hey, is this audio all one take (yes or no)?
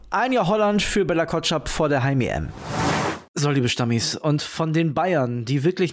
yes